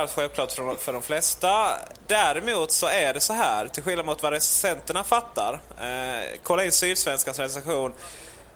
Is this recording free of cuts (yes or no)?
yes